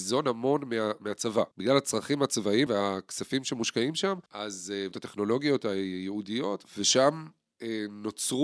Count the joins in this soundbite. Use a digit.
4